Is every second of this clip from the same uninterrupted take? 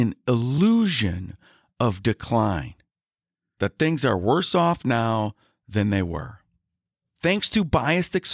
yes; 0 cuts

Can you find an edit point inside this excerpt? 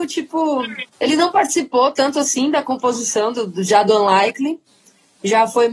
yes; 1 cut; at 0.9 s

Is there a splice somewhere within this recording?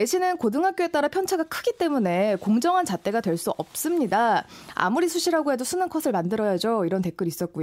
no; 0 cuts

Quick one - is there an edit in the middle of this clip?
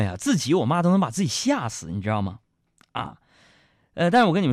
no; 0 cuts

